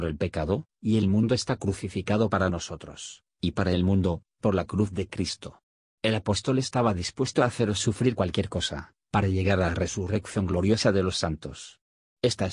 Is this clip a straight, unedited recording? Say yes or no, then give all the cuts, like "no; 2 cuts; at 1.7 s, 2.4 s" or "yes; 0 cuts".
yes; 0 cuts